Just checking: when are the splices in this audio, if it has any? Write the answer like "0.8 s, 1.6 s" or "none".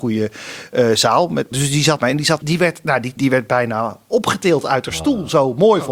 1.5 s, 2.0 s, 2.4 s, 3.2 s